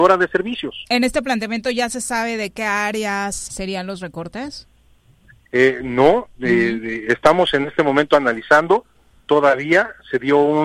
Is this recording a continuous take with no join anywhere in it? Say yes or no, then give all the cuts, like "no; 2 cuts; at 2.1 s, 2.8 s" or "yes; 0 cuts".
no; 1 cut; at 3.5 s